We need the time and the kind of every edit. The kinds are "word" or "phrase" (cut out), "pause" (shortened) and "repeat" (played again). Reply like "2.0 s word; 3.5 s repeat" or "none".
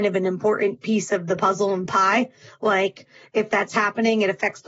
none